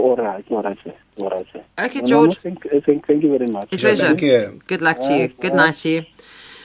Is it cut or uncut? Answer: cut